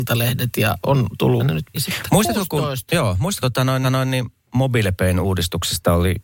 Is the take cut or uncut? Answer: cut